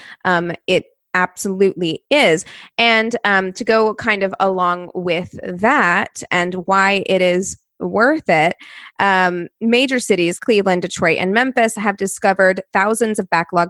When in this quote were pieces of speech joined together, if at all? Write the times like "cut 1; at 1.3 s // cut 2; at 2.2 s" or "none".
cut 1; at 10.4 s